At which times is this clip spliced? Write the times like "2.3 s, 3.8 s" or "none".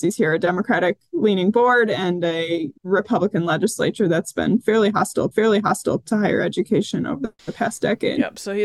2.8 s, 5.3 s, 7.4 s